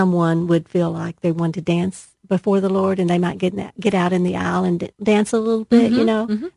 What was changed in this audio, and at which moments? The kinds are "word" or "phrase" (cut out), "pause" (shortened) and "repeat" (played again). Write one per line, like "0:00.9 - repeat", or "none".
0:04.9 - pause